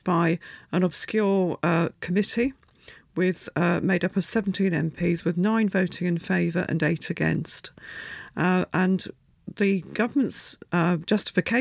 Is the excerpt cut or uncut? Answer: uncut